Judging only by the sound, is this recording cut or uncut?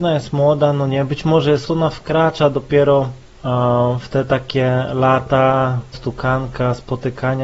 cut